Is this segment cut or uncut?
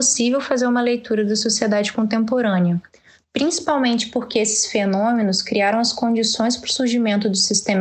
uncut